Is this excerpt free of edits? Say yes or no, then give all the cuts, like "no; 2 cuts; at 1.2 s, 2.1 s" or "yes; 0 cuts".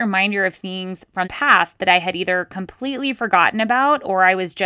no; 1 cut; at 1.2 s